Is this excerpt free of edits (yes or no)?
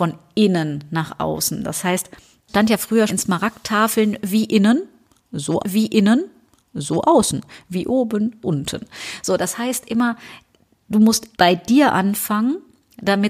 no